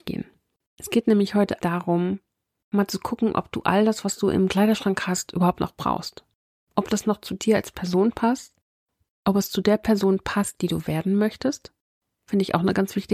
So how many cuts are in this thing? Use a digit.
0